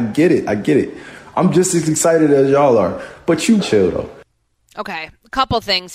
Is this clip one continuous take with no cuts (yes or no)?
no